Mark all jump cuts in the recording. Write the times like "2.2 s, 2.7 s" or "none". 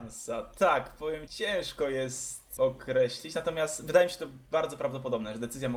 1.3 s, 2.6 s